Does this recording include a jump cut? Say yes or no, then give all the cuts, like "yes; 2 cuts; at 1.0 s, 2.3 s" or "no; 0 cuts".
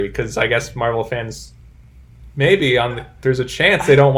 no; 0 cuts